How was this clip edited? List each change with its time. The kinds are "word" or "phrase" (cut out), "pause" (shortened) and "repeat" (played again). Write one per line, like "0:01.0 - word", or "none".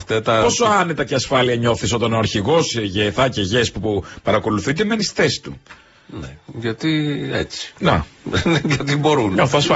none